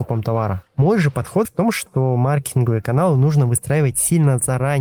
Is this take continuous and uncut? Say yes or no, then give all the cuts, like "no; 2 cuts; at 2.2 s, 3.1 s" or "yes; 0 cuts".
no; 1 cut; at 1.4 s